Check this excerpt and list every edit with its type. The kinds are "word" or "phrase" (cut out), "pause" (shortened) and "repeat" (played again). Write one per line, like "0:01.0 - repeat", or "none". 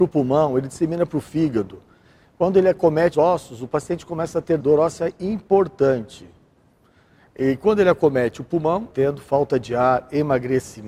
0:03.1 - word
0:04.6 - phrase
0:08.9 - phrase